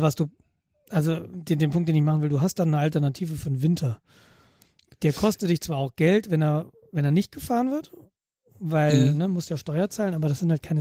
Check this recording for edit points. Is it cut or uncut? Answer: uncut